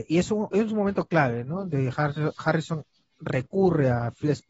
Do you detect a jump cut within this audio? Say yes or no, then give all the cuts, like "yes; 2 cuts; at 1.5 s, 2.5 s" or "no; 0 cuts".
no; 0 cuts